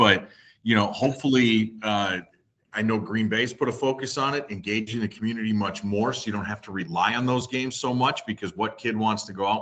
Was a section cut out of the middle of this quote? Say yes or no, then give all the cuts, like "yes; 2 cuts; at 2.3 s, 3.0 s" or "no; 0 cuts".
no; 0 cuts